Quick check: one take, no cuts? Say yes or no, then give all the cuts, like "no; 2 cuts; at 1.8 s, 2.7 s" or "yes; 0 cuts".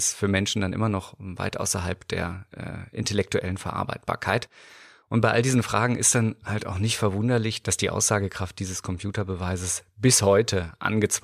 yes; 0 cuts